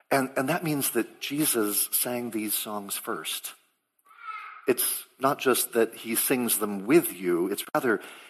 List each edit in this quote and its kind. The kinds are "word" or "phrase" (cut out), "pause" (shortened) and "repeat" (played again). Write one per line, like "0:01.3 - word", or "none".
none